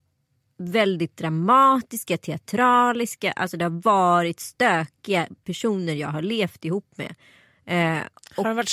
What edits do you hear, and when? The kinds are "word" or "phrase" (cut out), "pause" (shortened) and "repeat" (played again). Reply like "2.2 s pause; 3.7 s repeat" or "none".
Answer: none